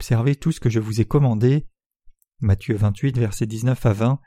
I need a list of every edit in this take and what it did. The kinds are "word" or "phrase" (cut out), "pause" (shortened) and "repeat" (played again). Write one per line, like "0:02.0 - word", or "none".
none